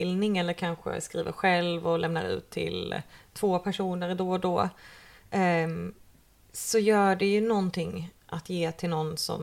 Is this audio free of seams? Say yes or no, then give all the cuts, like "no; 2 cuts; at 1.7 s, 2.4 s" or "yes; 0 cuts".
yes; 0 cuts